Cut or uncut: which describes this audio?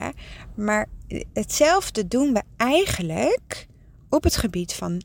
uncut